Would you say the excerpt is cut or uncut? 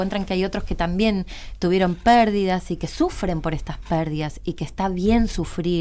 uncut